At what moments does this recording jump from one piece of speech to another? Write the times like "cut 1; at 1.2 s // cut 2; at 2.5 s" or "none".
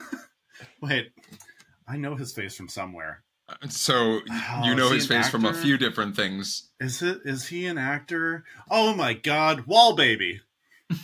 none